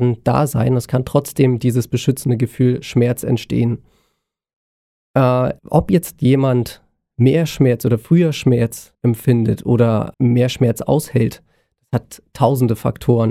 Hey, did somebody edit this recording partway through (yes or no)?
yes